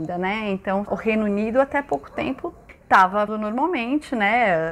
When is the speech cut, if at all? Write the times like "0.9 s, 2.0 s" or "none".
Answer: 3.3 s